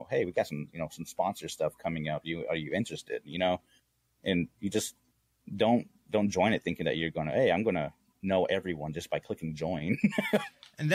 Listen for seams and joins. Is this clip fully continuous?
yes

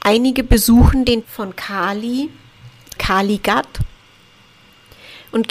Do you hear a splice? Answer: yes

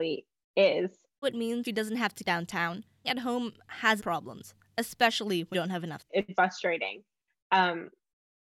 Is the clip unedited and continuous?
no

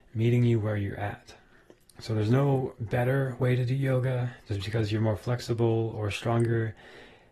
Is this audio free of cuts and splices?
yes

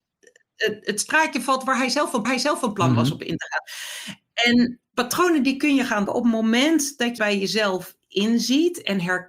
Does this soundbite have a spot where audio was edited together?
yes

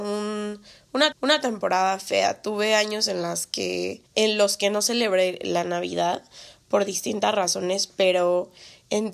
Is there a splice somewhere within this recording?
yes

